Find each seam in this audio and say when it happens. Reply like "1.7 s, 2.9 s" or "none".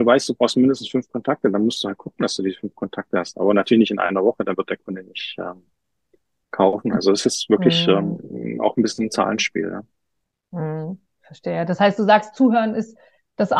none